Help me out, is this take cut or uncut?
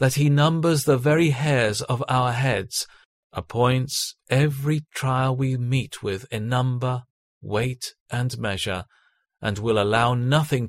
uncut